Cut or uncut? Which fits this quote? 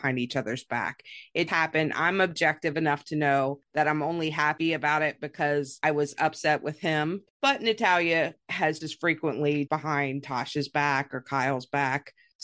cut